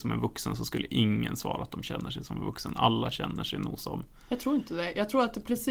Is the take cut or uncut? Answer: uncut